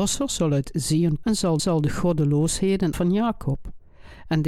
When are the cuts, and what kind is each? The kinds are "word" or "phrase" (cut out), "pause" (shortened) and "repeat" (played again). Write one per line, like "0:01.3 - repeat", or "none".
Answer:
0:01.2 - word
0:01.6 - repeat
0:02.9 - word

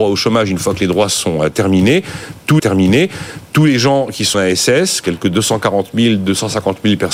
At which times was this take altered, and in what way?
0:02.6 - repeat
0:04.3 - word

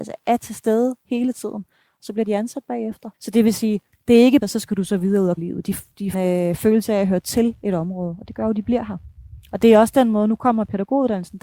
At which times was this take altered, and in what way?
0:03.1 - pause
0:03.9 - pause
0:04.4 - phrase
0:05.4 - phrase
0:06.1 - phrase

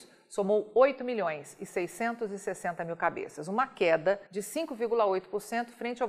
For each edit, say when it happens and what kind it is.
0:04.3 - pause

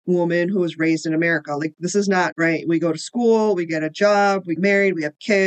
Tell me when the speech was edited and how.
0:02.3 - word
0:04.6 - word

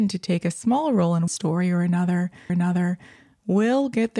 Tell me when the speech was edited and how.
0:01.3 - word
0:02.5 - repeat

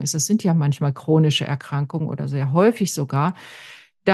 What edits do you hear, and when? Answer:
none

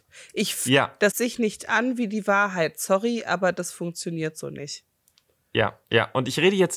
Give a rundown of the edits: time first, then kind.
0:01.1 - phrase

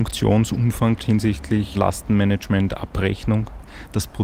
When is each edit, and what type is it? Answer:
0:01.0 - word
0:01.7 - word

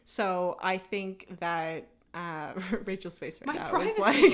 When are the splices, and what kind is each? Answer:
none

